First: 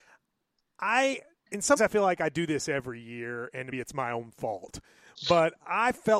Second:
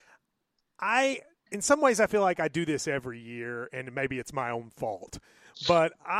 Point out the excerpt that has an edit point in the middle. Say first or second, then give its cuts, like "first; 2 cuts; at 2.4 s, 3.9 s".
first; 2 cuts; at 1.8 s, 3.7 s